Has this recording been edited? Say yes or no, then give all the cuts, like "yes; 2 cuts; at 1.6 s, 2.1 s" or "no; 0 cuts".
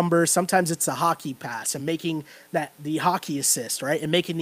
no; 0 cuts